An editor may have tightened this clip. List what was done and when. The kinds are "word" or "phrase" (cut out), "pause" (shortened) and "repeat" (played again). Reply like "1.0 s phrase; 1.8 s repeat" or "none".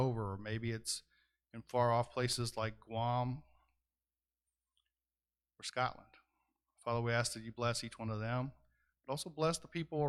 none